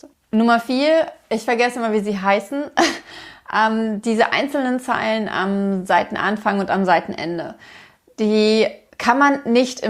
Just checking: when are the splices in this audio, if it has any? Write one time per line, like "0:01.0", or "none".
0:08.9